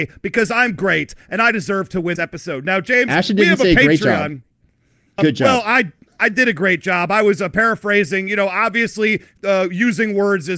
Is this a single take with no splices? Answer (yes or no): no